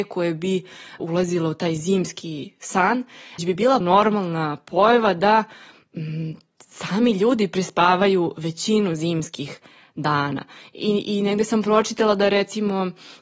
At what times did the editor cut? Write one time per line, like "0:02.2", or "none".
0:01.0
0:03.4
0:03.8